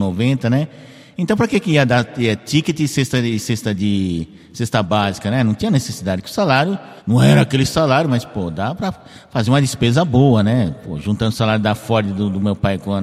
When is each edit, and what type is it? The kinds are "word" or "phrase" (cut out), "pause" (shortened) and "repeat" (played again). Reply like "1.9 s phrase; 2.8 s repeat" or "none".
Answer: 7.0 s pause